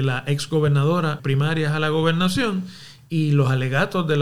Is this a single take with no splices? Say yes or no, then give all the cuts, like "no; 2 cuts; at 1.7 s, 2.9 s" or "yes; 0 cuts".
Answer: no; 1 cut; at 1.2 s